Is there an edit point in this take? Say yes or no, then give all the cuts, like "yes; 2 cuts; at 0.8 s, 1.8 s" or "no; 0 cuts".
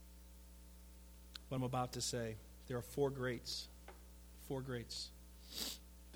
no; 0 cuts